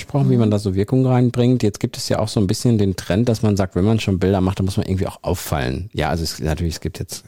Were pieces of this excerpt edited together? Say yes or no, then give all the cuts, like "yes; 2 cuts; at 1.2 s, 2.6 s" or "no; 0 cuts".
no; 0 cuts